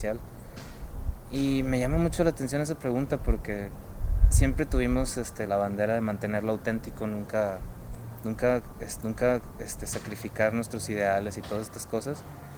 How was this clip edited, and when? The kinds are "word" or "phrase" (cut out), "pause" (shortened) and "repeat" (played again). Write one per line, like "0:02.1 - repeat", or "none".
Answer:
0:05.5 - word
0:09.0 - repeat